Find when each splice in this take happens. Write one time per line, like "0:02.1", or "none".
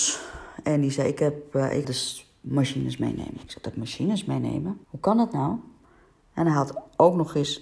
0:01.8
0:04.8